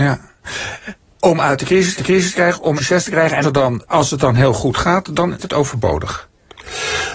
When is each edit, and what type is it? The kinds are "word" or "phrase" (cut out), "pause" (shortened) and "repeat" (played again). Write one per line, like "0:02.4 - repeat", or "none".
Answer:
0:01.1 - pause
0:02.0 - repeat
0:02.8 - word
0:03.4 - word
0:03.8 - word
0:05.4 - word